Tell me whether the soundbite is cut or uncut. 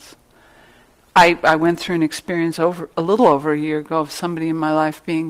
uncut